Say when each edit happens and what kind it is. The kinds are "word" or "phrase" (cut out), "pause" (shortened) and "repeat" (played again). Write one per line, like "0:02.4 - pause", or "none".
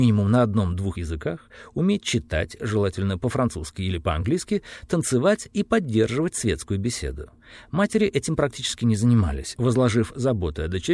0:00.9 - word